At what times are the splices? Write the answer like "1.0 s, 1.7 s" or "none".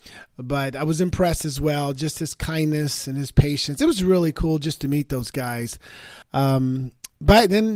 6.2 s